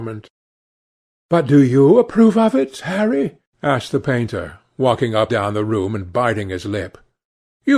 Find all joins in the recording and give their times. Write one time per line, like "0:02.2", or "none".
0:05.3